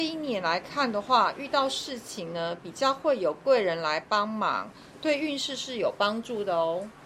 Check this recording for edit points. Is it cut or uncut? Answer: uncut